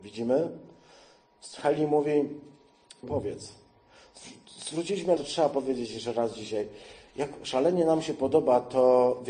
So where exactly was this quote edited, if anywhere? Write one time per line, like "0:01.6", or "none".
0:03.0
0:05.2